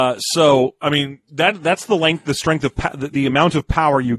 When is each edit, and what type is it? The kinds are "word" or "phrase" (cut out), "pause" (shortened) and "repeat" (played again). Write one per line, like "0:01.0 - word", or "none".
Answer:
none